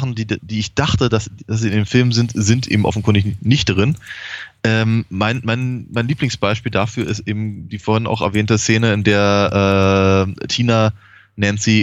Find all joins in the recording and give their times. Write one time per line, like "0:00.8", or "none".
none